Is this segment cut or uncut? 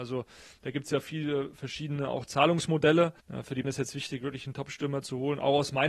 cut